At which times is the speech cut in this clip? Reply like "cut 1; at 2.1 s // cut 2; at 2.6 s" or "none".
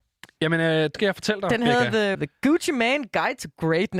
cut 1; at 0.9 s // cut 2; at 2.1 s